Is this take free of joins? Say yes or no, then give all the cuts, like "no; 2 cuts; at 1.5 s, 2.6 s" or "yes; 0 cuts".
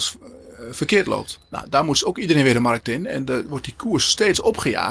yes; 0 cuts